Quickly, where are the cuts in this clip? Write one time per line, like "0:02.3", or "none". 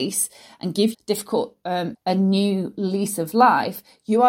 0:00.9
0:01.9